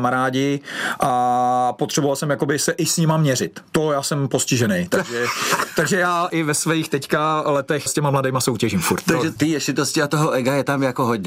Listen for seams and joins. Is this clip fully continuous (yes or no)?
no